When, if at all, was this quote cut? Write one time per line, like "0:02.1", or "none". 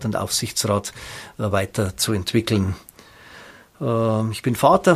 none